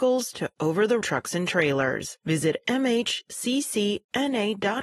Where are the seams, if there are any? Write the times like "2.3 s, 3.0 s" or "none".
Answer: 1.0 s